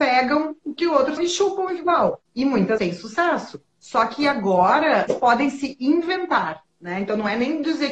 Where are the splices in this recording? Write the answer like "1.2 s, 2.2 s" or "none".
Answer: 1.2 s, 1.8 s, 2.3 s, 2.8 s, 3.7 s, 5.1 s, 6.7 s